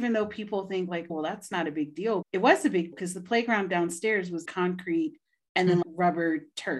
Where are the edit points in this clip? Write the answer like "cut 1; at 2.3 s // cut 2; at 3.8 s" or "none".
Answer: cut 1; at 1.1 s // cut 2; at 2.2 s // cut 3; at 2.9 s // cut 4; at 4.4 s // cut 5; at 5.8 s